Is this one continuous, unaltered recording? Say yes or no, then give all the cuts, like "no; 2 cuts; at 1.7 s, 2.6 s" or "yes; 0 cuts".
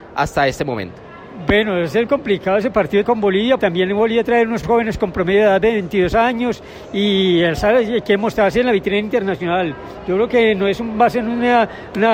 no; 4 cuts; at 2.1 s, 3.0 s, 3.6 s, 4.6 s